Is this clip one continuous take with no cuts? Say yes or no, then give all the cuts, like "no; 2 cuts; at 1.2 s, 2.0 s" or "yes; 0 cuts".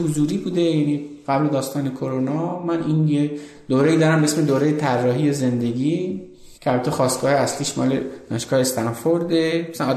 no; 1 cut; at 6.6 s